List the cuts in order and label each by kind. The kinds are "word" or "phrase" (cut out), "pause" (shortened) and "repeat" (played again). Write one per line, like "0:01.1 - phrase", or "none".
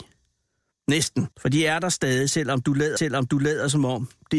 0:01.3 - pause
0:03.0 - repeat